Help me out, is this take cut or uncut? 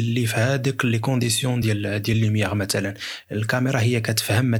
uncut